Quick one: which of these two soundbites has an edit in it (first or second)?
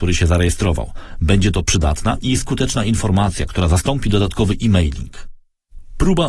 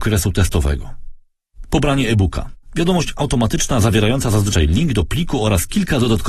second